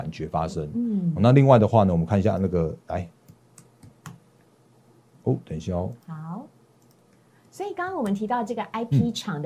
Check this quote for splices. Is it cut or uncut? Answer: uncut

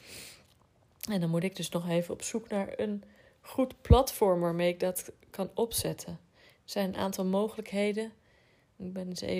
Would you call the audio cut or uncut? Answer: uncut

